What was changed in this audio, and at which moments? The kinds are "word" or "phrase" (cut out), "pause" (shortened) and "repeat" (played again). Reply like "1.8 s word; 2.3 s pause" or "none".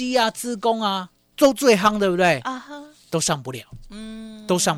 1.2 s pause